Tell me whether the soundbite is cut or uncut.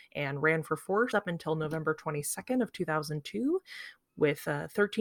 cut